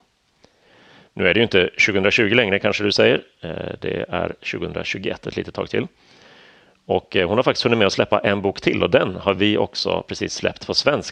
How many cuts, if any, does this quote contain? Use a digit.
0